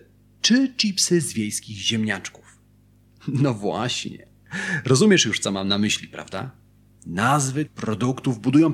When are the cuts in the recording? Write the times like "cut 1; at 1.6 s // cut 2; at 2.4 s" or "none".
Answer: cut 1; at 7.7 s